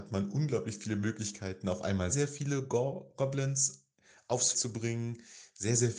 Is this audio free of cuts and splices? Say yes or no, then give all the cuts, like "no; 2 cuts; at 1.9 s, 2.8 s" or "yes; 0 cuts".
no; 2 cuts; at 2.1 s, 4.5 s